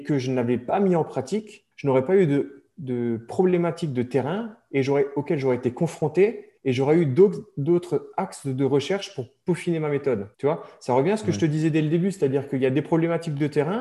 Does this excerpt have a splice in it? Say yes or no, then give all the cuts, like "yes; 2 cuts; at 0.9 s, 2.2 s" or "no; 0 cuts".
yes; 3 cuts; at 1.7 s, 6.6 s, 10.3 s